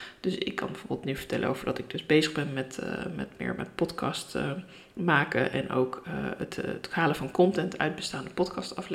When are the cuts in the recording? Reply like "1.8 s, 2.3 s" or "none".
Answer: none